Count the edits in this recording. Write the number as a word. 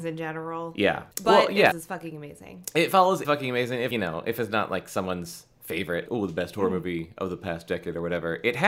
five